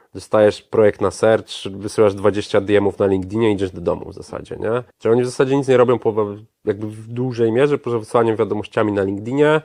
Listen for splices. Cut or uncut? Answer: cut